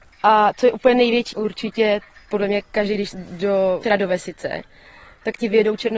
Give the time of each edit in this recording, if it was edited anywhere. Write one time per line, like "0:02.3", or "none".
0:01.3
0:03.1
0:03.8